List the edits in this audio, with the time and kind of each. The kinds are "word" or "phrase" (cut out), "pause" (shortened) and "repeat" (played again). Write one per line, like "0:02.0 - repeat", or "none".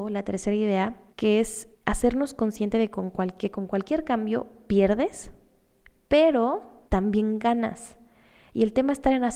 0:01.1 - pause
0:01.7 - pause
0:06.9 - pause

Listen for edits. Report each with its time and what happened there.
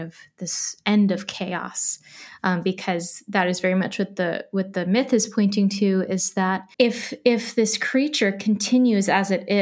0:06.7 - pause

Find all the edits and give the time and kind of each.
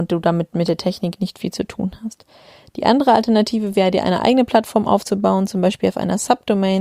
none

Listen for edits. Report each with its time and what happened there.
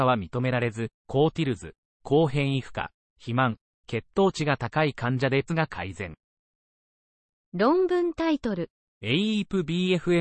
0:01.0 - pause
0:05.5 - word

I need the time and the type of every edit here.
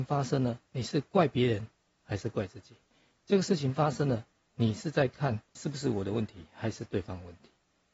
0:05.6 - word

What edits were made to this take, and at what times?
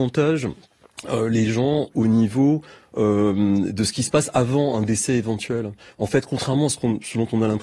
none

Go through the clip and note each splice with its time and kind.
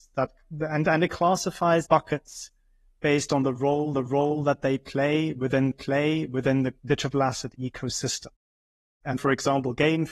0:01.9 - phrase
0:03.9 - repeat
0:05.7 - repeat
0:09.2 - word

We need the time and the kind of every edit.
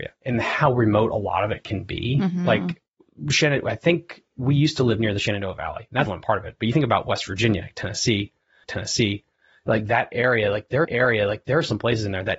0:06.1 - word
0:08.6 - repeat
0:10.8 - repeat

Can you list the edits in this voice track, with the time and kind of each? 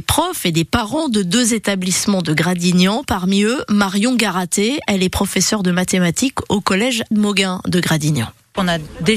0:07.1 - word

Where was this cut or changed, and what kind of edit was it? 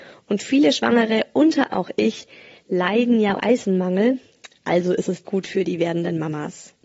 0:01.7 - word
0:03.4 - word
0:05.2 - word

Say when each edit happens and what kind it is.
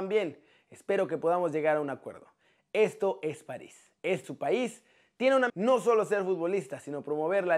0:04.2 - word
0:05.5 - word

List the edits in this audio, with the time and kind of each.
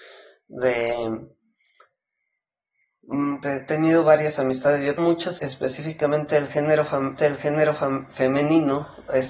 0:03.4 - word
0:05.0 - word
0:05.4 - word
0:07.2 - repeat

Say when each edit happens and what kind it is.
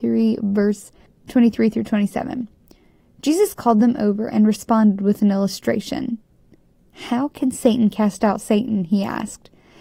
0:01.1 - pause

